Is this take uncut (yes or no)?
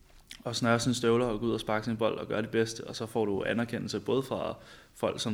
yes